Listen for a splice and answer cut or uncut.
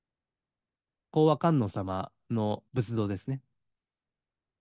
cut